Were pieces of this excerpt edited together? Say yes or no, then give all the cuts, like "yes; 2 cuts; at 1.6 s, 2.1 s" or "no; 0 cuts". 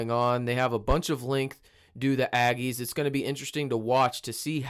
no; 0 cuts